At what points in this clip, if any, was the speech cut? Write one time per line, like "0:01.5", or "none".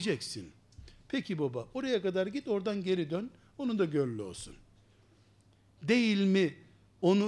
none